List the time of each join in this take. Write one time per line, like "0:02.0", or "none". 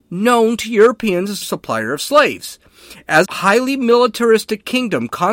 0:01.4
0:03.2